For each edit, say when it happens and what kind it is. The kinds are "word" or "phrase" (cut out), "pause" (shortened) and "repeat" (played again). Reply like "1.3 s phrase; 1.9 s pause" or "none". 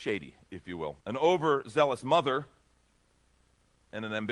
1.0 s pause